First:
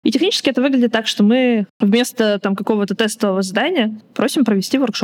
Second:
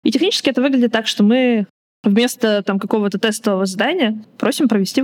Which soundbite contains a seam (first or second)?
first